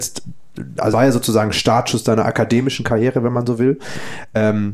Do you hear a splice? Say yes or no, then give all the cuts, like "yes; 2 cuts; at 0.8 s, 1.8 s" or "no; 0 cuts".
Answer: yes; 1 cut; at 0.9 s